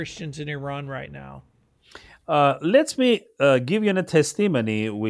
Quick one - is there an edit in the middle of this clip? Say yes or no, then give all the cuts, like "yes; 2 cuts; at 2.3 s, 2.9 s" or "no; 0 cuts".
no; 0 cuts